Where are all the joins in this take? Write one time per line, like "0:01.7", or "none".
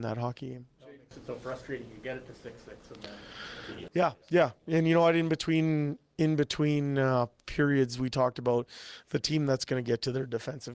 0:04.2